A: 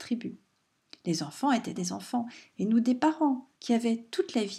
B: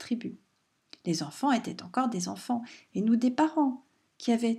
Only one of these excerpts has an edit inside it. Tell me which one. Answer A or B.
A